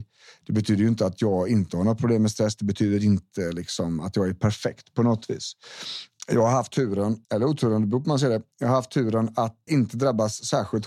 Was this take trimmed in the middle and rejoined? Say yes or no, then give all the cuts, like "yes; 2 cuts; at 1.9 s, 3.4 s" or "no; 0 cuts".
yes; 2 cuts; at 7.2 s, 9.7 s